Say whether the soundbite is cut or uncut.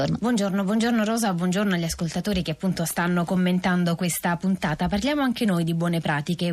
uncut